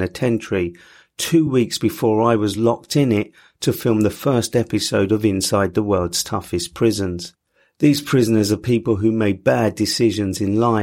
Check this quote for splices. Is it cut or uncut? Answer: uncut